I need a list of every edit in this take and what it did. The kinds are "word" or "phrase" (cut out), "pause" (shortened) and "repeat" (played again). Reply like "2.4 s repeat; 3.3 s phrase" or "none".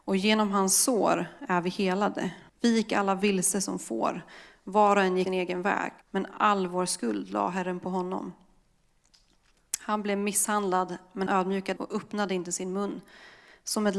2.5 s pause; 5.3 s word; 6.0 s pause; 11.3 s word; 11.8 s word